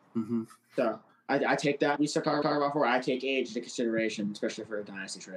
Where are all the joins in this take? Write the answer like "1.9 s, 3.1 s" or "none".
1.1 s, 2.0 s, 2.4 s